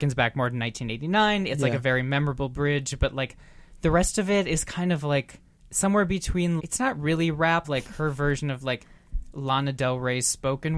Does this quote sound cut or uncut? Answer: cut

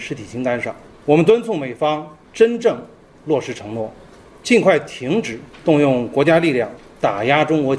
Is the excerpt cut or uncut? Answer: uncut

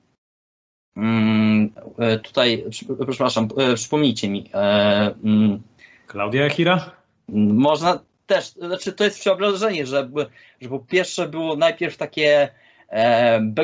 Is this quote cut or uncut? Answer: uncut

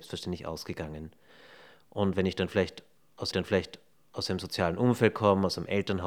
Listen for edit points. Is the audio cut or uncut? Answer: cut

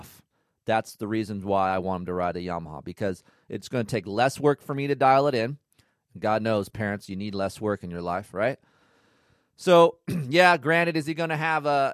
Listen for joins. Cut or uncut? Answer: uncut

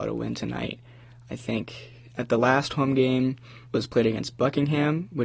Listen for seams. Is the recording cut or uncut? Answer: cut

